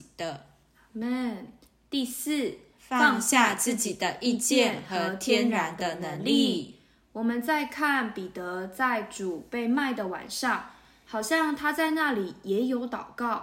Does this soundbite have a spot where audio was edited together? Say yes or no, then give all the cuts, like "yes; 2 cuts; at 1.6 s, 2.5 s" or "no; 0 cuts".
no; 0 cuts